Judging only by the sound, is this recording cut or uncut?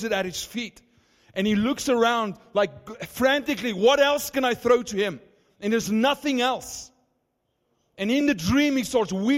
uncut